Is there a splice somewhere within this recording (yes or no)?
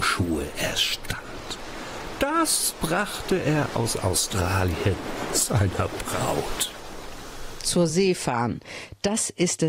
no